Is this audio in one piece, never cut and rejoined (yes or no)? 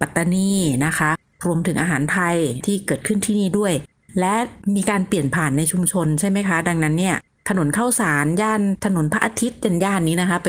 yes